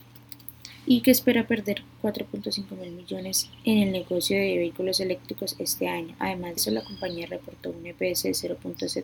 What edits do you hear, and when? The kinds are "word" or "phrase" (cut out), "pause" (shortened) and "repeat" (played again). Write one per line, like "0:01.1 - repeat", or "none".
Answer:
0:06.6 - word